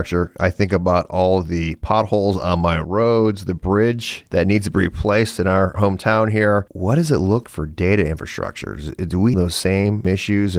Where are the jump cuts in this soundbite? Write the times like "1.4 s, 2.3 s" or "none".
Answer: 7.4 s, 9.3 s